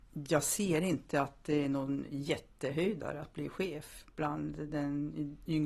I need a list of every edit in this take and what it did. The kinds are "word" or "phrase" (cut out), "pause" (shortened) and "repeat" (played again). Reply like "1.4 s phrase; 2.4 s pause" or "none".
none